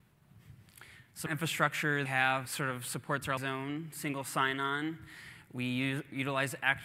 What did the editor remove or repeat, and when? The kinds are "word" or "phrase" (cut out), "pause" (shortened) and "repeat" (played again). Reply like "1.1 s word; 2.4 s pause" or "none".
1.3 s word; 2.0 s phrase; 2.4 s word; 3.4 s word